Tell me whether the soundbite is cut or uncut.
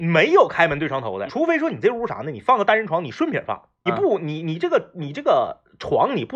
cut